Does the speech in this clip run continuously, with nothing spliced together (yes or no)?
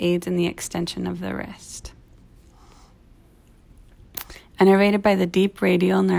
yes